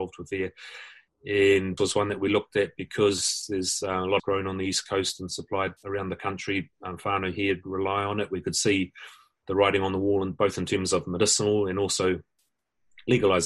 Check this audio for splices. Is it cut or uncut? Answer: cut